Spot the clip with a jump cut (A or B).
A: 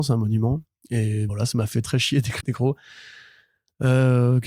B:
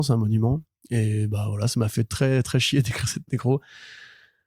A